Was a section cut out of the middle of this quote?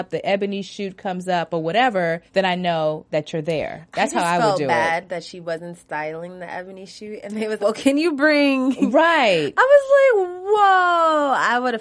yes; 3 cuts; at 2.3 s, 3.1 s, 7.6 s

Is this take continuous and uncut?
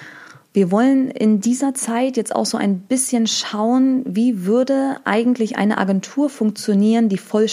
yes; 0 cuts

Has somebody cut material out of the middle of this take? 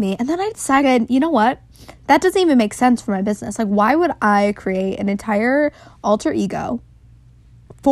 no; 0 cuts

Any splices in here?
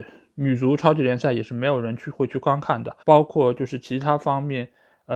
yes; 1 cut; at 3.0 s

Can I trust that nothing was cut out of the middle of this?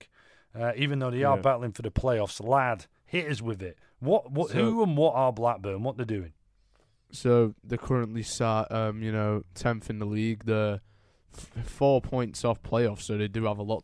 yes; 0 cuts

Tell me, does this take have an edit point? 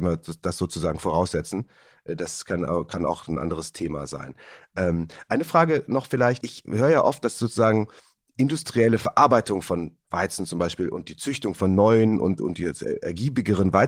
no; 0 cuts

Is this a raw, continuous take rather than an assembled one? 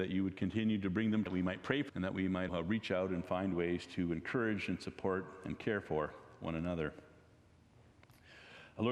no; 3 cuts; at 1.3 s, 1.9 s, 2.5 s

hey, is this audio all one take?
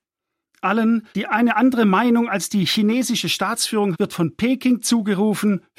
no; 2 cuts; at 1.1 s, 3.9 s

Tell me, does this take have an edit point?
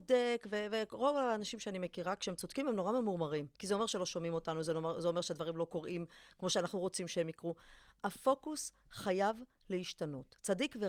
yes; 1 cut; at 3.5 s

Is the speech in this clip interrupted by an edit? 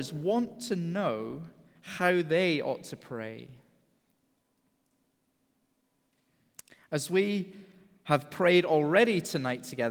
no; 0 cuts

